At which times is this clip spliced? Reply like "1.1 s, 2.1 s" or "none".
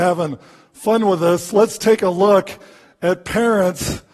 none